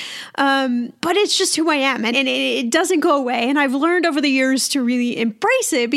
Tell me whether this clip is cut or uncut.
cut